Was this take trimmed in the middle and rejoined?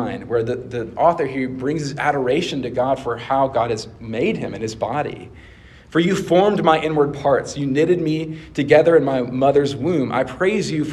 no; 0 cuts

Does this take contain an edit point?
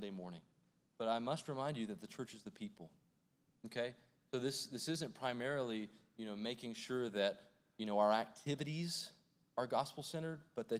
no; 0 cuts

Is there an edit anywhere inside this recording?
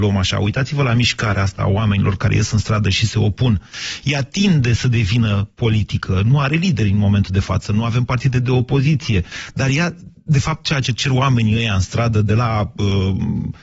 no; 0 cuts

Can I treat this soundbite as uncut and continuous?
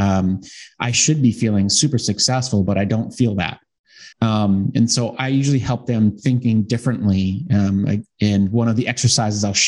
no; 1 cut; at 4.1 s

